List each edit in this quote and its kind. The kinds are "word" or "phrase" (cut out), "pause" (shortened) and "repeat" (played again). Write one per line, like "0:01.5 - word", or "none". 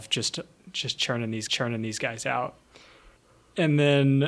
0:01.5 - repeat